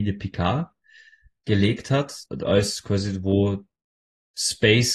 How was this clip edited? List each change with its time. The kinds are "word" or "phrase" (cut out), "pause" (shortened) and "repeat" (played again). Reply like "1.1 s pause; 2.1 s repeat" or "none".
2.3 s pause